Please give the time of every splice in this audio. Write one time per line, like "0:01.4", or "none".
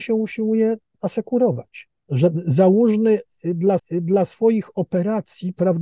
0:02.0
0:03.8